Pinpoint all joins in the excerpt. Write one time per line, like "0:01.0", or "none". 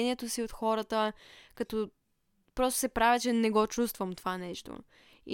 none